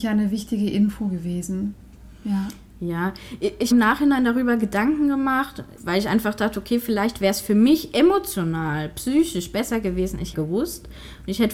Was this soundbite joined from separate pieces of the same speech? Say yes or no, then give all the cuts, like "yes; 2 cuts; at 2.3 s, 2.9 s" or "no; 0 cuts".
yes; 3 cuts; at 3.7 s, 5.8 s, 10.3 s